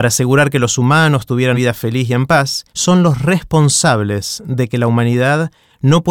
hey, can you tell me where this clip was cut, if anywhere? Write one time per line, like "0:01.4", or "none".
0:01.5
0:02.7